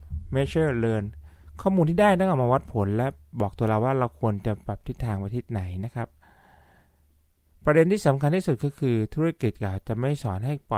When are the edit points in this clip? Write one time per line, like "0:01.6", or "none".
none